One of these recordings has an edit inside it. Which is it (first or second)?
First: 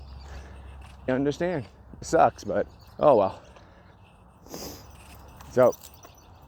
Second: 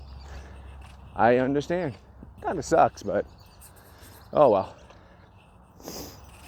first